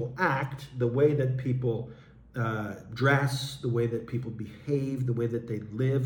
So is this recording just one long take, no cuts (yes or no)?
yes